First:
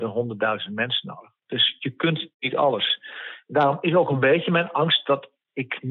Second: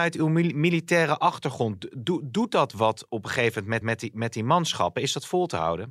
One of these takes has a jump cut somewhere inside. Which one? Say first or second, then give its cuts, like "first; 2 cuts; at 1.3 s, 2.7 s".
second; 1 cut; at 3.8 s